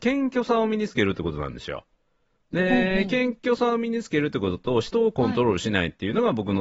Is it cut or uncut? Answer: uncut